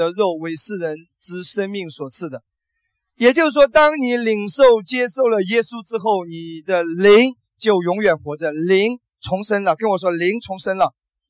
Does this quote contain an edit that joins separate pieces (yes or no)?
no